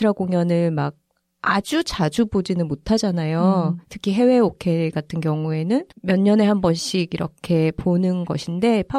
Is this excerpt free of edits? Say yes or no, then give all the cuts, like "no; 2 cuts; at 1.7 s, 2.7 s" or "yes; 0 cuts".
no; 1 cut; at 5.9 s